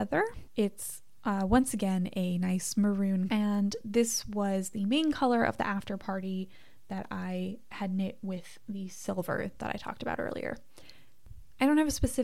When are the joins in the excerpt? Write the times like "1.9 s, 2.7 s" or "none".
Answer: none